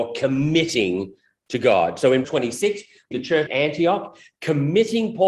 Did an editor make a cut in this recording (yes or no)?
yes